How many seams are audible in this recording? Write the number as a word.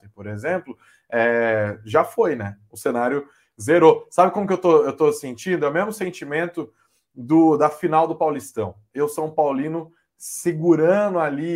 zero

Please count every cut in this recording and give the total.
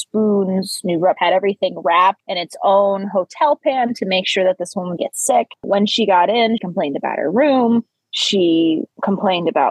three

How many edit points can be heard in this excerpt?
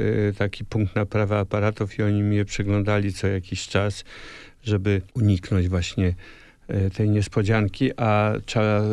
one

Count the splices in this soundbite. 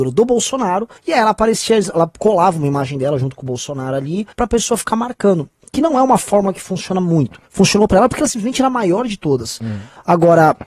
three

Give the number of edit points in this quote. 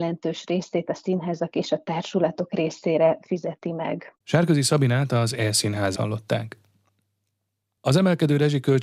two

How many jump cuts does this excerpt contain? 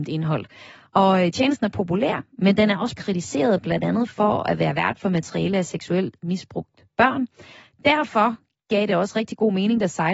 one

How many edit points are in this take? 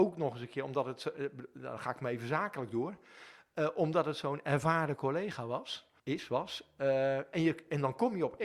one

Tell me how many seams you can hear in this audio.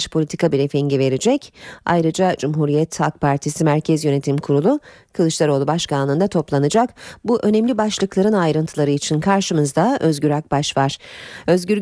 zero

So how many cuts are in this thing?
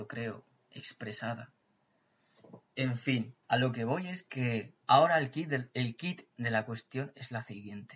two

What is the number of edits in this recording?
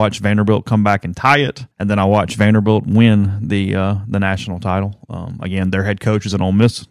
one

